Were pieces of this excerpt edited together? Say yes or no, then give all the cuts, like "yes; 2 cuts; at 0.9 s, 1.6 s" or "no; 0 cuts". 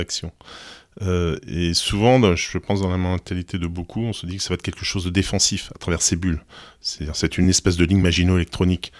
no; 0 cuts